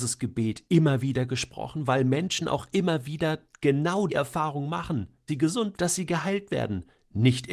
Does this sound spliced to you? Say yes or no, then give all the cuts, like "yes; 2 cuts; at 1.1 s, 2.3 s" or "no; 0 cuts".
yes; 3 cuts; at 4.1 s, 5.3 s, 5.7 s